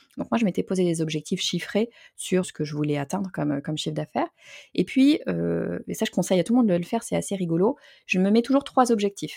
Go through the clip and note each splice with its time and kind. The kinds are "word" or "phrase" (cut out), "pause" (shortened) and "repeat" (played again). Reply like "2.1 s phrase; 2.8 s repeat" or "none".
2.4 s word